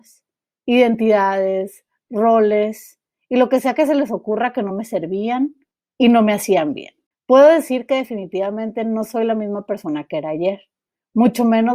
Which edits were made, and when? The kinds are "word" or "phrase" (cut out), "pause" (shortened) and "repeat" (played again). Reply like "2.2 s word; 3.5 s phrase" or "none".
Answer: none

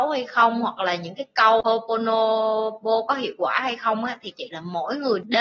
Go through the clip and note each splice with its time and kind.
4.3 s phrase

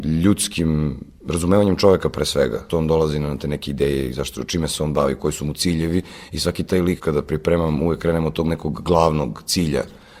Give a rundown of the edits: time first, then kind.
2.7 s word; 7.0 s word

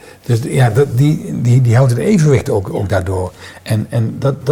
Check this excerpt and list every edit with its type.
none

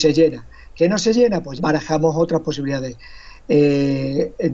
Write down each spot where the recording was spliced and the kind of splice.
1.6 s word

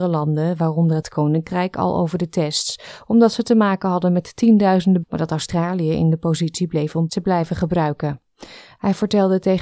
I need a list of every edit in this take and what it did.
1.0 s word; 5.0 s word; 7.1 s word

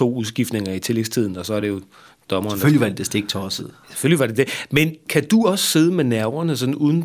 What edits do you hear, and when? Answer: none

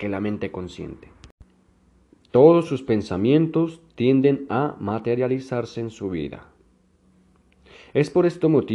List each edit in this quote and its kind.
none

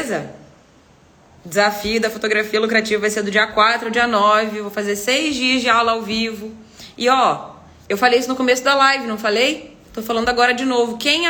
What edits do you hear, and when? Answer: none

